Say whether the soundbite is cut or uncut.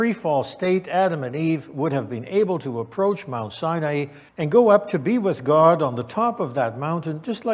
cut